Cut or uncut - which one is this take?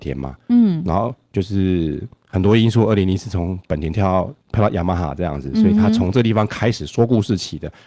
uncut